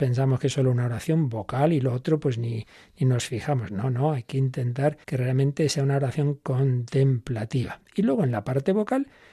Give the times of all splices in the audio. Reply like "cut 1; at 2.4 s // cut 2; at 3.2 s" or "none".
cut 1; at 5.0 s